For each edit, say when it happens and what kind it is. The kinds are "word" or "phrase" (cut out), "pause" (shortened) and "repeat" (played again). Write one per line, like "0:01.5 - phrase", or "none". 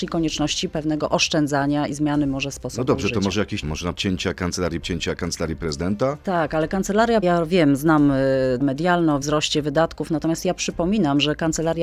0:03.6 - word
0:03.9 - word
0:04.8 - word
0:07.2 - word
0:08.6 - word
0:09.2 - word